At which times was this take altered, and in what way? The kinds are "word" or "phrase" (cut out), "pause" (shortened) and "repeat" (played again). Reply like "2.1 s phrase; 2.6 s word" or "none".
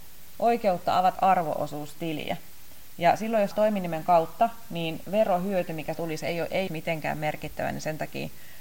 1.2 s word; 3.5 s word; 5.0 s word; 5.9 s word; 6.7 s word